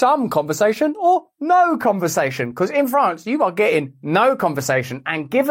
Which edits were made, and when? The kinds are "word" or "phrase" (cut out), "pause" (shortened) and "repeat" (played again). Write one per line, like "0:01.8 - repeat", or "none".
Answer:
none